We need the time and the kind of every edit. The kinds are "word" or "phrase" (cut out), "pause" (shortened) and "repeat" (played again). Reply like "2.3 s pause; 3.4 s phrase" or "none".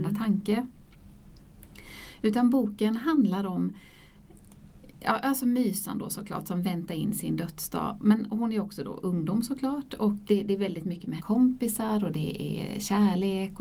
10.3 s word; 11.2 s word